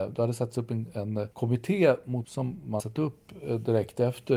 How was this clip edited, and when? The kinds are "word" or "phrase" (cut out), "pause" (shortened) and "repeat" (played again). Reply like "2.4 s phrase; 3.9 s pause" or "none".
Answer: 1.3 s pause; 2.2 s word; 2.8 s word